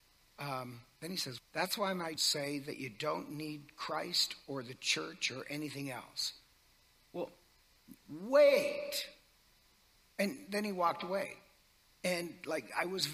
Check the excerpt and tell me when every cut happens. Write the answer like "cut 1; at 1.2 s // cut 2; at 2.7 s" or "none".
cut 1; at 1.4 s // cut 2; at 2.2 s